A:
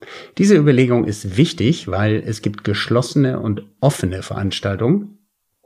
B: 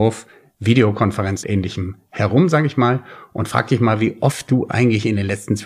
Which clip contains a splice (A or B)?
B